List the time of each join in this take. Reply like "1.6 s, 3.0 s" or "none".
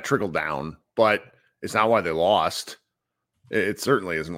none